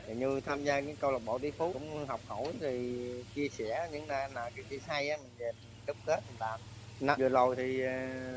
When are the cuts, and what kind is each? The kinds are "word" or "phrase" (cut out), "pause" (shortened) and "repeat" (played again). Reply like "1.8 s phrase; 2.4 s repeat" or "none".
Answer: 1.7 s word; 4.8 s word; 7.2 s word